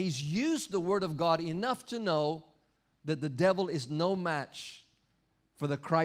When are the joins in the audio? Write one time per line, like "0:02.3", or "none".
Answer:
none